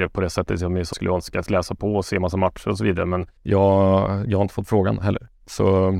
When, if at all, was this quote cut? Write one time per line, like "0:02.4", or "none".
0:00.9
0:01.5
0:03.4